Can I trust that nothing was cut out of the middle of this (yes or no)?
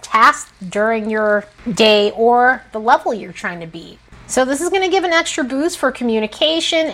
yes